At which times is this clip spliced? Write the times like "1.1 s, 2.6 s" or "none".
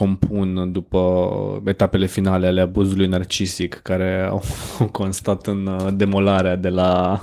none